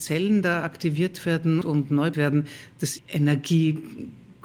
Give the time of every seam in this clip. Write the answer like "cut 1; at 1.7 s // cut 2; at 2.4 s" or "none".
cut 1; at 1.6 s // cut 2; at 2.1 s // cut 3; at 3.0 s